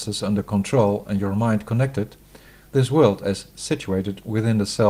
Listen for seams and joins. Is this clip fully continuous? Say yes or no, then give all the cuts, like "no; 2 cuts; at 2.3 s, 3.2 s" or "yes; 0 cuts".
yes; 0 cuts